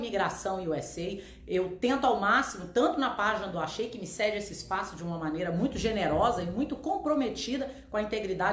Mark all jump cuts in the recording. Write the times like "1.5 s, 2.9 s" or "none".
none